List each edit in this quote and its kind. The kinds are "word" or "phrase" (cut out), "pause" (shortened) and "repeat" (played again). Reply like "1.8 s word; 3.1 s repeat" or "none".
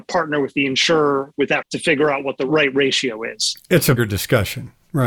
1.6 s word; 4.0 s word